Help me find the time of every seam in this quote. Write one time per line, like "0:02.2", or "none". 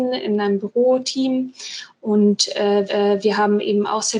0:02.9

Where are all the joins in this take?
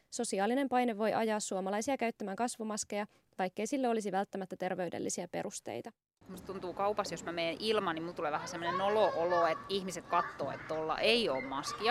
none

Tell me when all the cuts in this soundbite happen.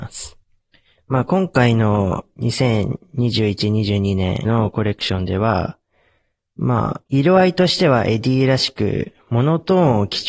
0:04.4
0:07.1

